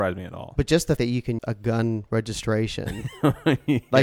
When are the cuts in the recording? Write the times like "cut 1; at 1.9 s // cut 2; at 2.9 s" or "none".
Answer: cut 1; at 1.0 s // cut 2; at 1.4 s